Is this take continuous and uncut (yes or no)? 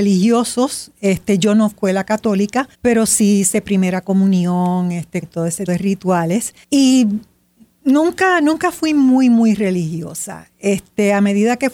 no